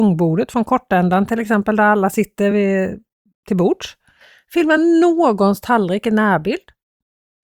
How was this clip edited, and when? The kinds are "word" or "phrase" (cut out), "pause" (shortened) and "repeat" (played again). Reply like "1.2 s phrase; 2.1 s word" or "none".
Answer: none